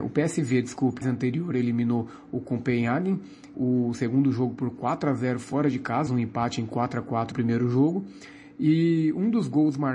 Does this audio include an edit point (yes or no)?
yes